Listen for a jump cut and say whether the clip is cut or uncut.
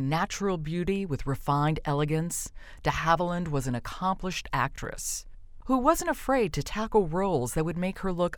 uncut